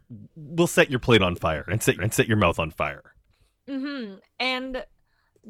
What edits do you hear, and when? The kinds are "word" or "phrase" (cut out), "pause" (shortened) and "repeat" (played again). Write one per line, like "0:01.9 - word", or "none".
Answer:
0:01.9 - repeat
0:03.3 - pause